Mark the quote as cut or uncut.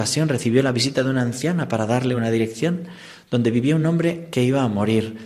uncut